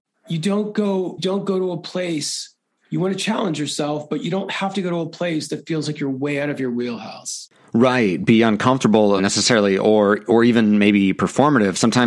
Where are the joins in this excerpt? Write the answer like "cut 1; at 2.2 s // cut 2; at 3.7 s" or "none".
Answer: cut 1; at 1.2 s // cut 2; at 9.2 s